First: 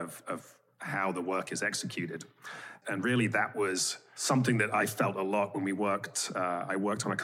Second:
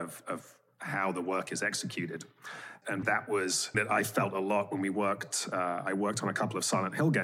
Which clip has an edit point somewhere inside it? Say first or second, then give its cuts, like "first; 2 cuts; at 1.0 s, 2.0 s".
second; 2 cuts; at 3.0 s, 3.7 s